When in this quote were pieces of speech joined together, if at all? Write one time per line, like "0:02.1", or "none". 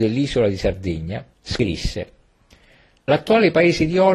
0:01.3